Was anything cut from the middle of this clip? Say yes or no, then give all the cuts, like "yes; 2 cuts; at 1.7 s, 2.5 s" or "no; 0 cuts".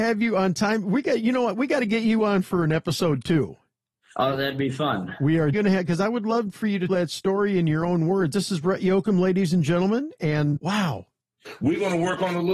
yes; 3 cuts; at 5.5 s, 6.9 s, 10.6 s